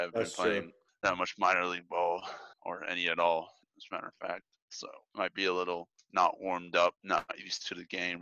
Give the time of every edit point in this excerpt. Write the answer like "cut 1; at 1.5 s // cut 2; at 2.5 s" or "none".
cut 1; at 2.5 s // cut 2; at 5.0 s // cut 3; at 7.0 s